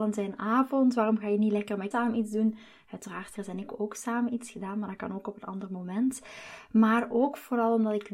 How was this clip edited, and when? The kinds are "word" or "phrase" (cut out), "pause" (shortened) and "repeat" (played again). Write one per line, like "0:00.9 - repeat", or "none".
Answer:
0:01.9 - word
0:03.3 - phrase